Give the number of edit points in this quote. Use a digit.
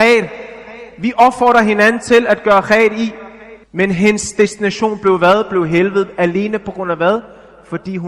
1